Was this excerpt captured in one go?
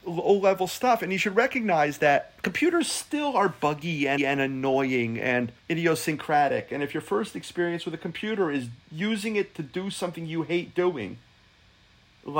no; 3 cuts; at 2.4 s, 4.2 s, 5.6 s

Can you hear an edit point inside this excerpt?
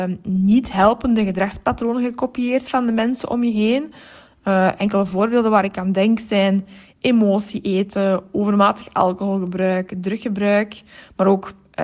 no; 0 cuts

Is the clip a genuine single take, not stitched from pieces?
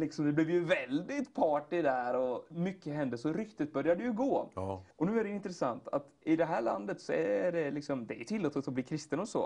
no; 2 cuts; at 4.9 s, 6.2 s

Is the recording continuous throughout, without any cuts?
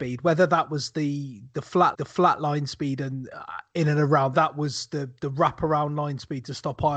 no; 2 cuts; at 1.9 s, 4.3 s

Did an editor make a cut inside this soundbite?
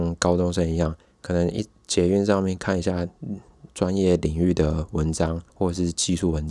yes; 2 cuts; at 1.0 s, 5.5 s

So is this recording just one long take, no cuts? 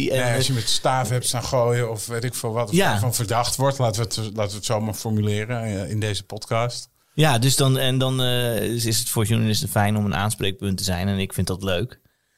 yes; 0 cuts

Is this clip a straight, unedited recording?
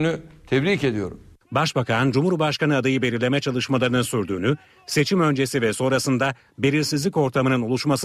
yes; 0 cuts

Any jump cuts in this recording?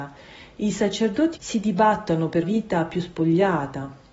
yes; 2 cuts; at 1.4 s, 2.4 s

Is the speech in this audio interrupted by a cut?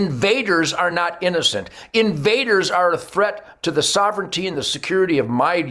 no; 0 cuts

